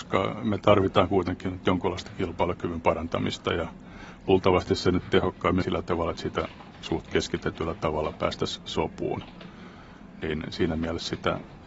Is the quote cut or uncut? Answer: cut